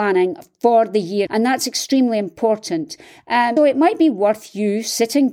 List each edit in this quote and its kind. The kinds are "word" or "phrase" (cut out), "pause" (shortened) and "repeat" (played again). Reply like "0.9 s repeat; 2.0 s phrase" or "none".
1.3 s word; 3.6 s word